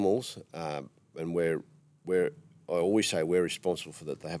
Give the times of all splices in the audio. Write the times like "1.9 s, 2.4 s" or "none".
1.8 s